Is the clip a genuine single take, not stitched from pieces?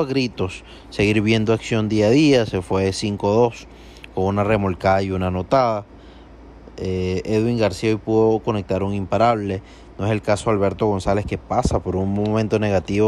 yes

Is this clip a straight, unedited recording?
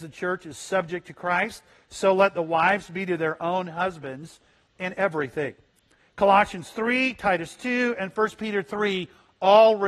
yes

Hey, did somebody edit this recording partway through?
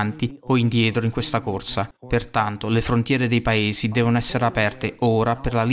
yes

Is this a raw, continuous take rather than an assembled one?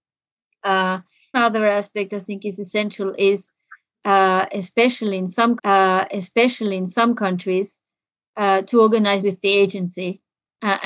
no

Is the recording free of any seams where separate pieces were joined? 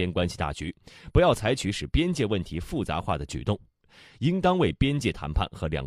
yes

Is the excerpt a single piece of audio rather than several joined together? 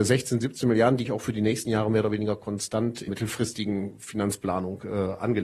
no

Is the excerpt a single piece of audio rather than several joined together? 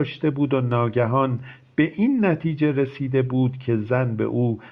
yes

